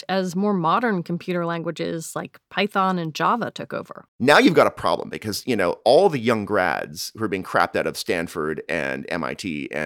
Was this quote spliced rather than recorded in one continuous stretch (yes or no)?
yes